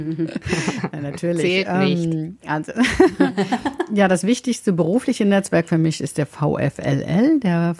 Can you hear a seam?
yes; 1 cut; at 2.4 s

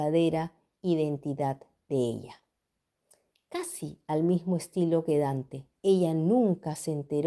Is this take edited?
no; 0 cuts

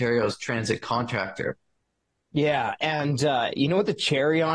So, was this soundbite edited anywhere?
no; 0 cuts

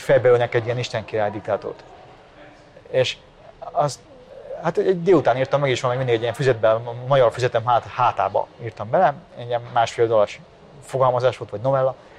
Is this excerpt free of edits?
yes; 0 cuts

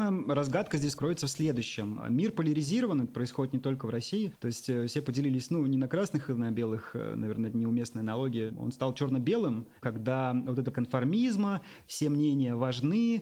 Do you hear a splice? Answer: yes; 2 cuts; at 9.8 s, 10.7 s

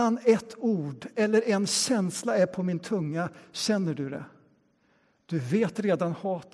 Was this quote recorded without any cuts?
yes; 0 cuts

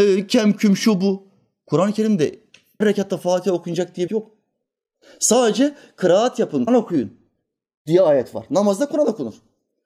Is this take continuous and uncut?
no; 3 cuts; at 2.8 s, 4.1 s, 6.7 s

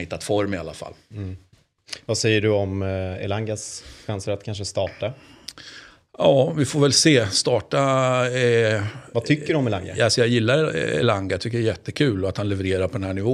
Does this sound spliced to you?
no; 0 cuts

